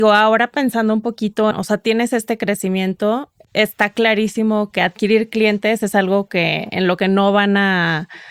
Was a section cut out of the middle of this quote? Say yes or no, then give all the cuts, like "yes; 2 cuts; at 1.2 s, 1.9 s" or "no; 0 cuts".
yes; 1 cut; at 1.5 s